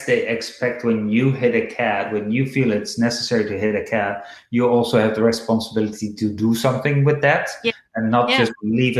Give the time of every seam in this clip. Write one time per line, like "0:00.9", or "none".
none